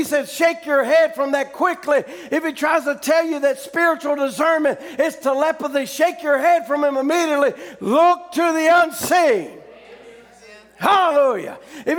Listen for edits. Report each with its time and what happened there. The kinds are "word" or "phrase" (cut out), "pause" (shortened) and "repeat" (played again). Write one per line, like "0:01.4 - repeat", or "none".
none